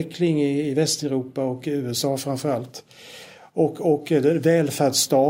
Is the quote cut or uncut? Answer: uncut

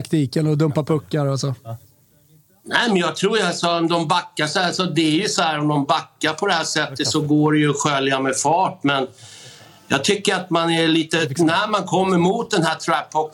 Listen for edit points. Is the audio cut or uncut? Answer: uncut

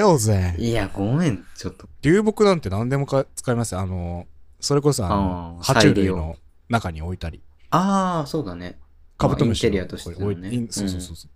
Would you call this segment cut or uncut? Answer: uncut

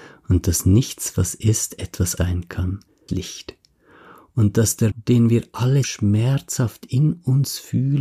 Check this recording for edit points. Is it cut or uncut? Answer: cut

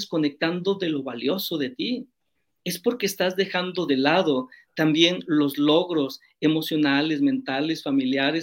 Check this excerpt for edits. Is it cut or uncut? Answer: uncut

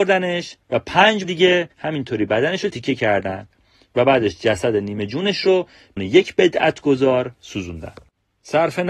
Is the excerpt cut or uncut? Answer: cut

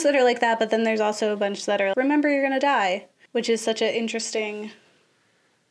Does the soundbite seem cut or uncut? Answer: cut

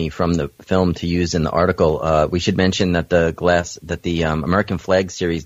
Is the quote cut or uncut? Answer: uncut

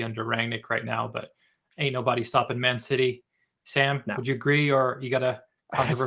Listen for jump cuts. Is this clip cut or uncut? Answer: uncut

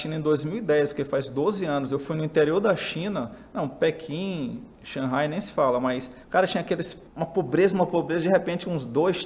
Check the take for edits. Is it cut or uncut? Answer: cut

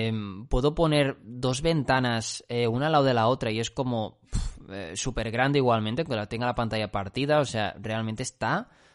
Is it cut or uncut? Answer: uncut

